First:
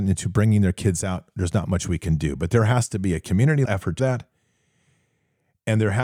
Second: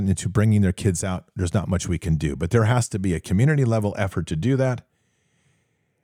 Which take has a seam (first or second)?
first